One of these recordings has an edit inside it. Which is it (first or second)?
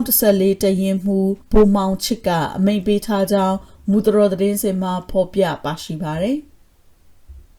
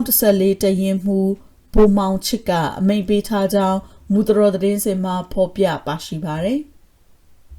first